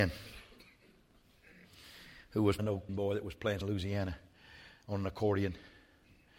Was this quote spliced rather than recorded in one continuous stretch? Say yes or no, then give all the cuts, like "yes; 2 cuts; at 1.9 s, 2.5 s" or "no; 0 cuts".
yes; 3 cuts; at 2.6 s, 2.9 s, 3.6 s